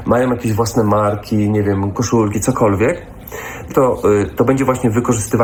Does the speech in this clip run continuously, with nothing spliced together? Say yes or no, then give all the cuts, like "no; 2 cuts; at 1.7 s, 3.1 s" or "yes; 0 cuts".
no; 3 cuts; at 1.9 s, 2.3 s, 3.7 s